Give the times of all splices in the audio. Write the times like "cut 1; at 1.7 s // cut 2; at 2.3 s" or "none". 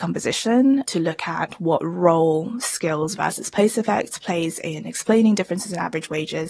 none